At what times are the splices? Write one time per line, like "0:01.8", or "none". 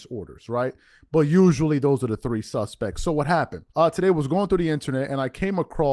0:03.7